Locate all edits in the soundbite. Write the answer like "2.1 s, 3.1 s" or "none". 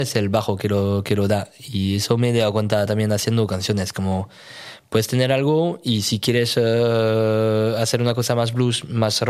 none